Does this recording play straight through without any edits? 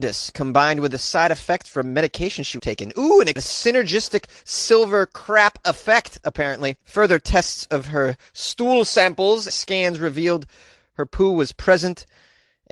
no; 4 cuts; at 2.6 s, 3.4 s, 6.8 s, 9.5 s

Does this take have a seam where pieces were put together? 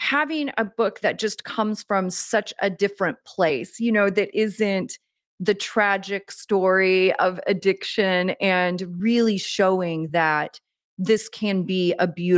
no; 0 cuts

